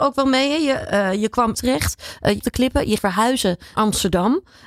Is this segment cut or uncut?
cut